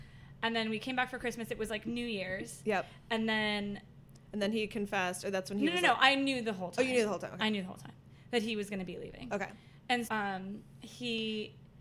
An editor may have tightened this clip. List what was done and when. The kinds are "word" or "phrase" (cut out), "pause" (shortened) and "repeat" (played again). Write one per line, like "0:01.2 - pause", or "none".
0:10.1 - word